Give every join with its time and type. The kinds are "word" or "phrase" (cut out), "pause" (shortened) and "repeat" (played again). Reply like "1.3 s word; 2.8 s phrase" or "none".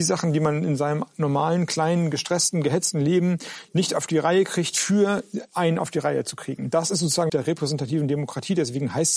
7.3 s phrase